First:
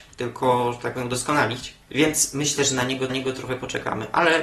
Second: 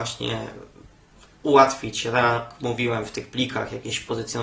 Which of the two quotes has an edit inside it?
first; 2 cuts; at 1.8 s, 3.1 s

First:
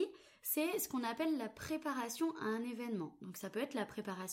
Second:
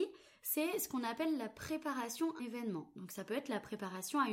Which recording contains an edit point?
second; 1 cut; at 2.4 s

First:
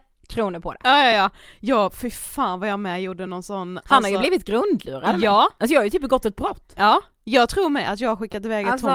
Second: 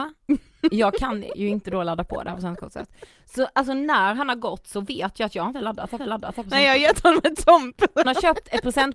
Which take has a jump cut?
second; 2 cuts; at 6.0 s, 8.0 s

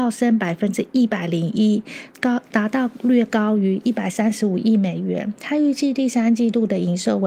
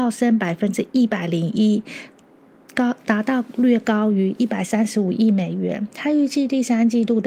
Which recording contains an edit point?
first; 1 cut; at 2.1 s

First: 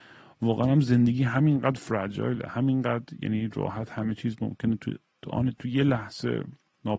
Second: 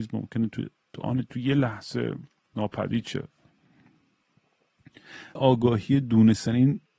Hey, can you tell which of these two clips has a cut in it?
second; 1 cut; at 5.4 s

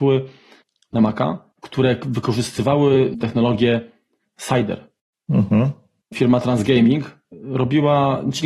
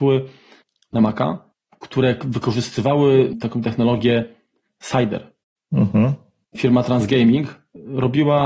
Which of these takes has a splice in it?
first; 2 cuts; at 1.6 s, 3.2 s

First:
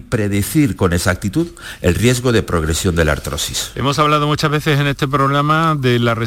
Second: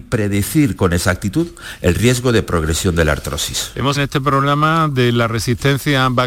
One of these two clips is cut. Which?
second; 1 cut; at 3.9 s

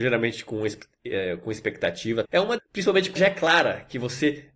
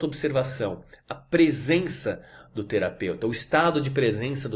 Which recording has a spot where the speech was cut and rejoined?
first; 3 cuts; at 2.2 s, 2.6 s, 3.2 s

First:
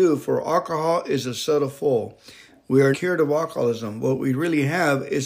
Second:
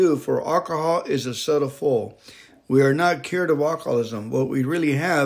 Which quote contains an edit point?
first; 1 cut; at 2.9 s

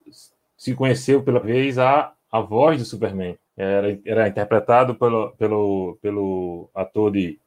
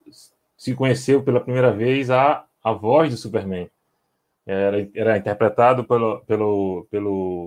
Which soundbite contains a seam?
first; 2 cuts; at 1.4 s, 3.5 s

